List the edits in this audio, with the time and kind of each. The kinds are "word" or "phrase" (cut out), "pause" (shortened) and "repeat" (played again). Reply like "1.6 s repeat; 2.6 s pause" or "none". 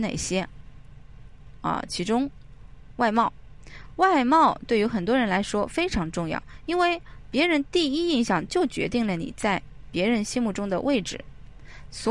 none